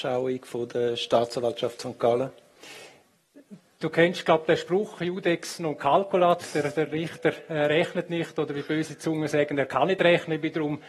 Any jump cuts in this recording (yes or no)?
no